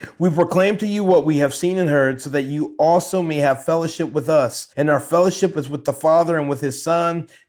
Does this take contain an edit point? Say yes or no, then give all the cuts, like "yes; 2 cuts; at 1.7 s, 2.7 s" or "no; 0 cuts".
yes; 1 cut; at 4.7 s